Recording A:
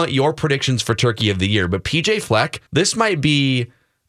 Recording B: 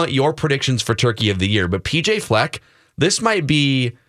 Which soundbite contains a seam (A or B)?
A